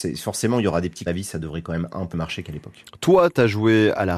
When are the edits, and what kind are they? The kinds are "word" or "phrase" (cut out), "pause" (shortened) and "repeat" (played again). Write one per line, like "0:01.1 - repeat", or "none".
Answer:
0:01.1 - phrase
0:02.1 - word